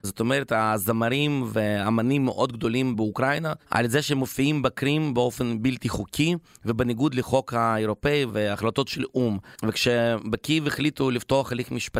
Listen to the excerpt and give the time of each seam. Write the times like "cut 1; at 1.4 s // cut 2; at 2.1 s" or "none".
cut 1; at 3.6 s // cut 2; at 9.6 s